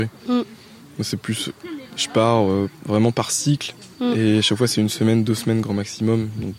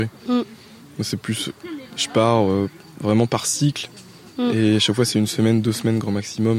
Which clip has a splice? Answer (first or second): first